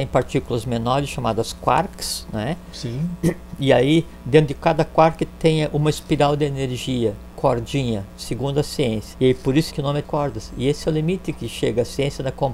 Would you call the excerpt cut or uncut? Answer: cut